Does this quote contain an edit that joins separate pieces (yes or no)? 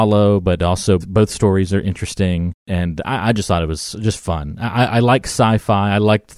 yes